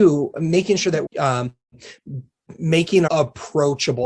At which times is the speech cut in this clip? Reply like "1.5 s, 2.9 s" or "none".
1.1 s, 3.1 s